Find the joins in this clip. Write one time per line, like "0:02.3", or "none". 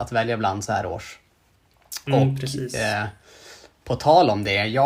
0:03.7